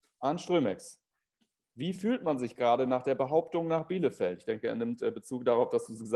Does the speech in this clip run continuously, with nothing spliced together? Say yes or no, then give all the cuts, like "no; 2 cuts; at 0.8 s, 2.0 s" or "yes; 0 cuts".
yes; 0 cuts